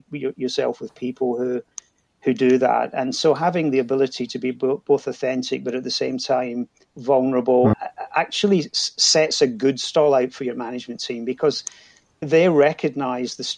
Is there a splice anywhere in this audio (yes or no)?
no